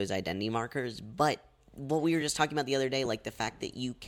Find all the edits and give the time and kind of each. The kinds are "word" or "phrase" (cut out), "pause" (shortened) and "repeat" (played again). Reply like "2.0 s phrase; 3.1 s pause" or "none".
none